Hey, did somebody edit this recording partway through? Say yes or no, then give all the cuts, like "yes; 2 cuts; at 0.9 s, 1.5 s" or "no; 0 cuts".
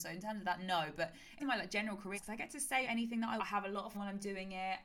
yes; 5 cuts; at 1.4 s, 2.1 s, 2.8 s, 3.4 s, 3.9 s